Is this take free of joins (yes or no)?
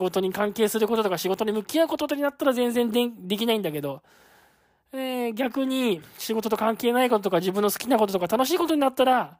yes